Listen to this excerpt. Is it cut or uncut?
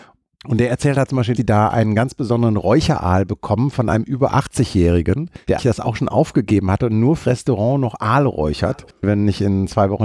cut